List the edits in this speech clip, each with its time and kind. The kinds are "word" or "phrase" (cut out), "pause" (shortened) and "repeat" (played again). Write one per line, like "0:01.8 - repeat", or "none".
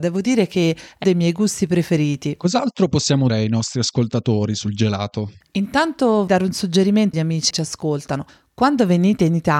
0:01.0 - word
0:03.3 - word
0:06.3 - word
0:07.1 - word
0:07.5 - word